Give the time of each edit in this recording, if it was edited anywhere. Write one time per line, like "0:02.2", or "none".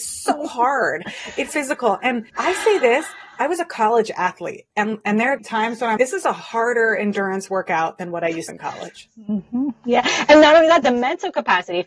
0:01.5
0:02.3
0:04.7
0:06.0
0:08.5
0:10.8